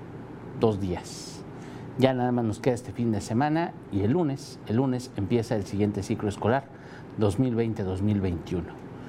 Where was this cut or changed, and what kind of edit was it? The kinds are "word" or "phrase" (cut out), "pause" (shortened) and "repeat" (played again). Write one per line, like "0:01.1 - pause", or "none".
none